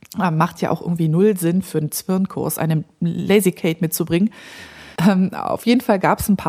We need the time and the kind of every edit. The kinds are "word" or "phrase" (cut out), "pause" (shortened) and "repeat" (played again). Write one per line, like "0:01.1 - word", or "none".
0:05.0 - pause